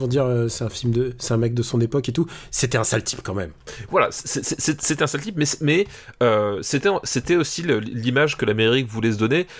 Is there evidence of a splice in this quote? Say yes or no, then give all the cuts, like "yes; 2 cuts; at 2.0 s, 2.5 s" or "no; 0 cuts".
no; 0 cuts